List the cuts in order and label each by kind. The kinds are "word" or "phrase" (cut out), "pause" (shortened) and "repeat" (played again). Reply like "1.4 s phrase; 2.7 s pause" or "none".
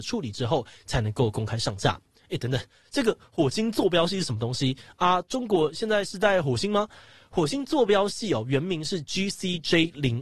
none